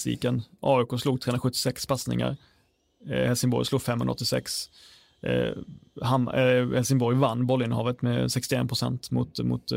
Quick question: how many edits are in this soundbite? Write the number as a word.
zero